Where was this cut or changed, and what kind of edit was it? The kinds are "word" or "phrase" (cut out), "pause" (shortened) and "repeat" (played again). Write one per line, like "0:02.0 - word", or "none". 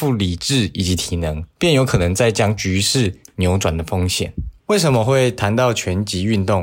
0:01.5 - pause
0:04.6 - pause